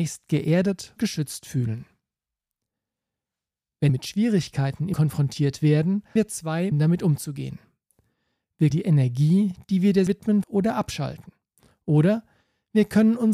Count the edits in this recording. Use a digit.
8